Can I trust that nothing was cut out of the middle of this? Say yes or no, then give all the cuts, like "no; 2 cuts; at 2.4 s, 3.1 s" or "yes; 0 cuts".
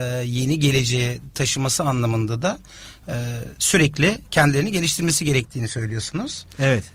yes; 0 cuts